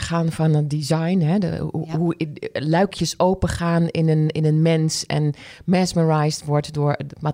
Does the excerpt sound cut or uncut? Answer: uncut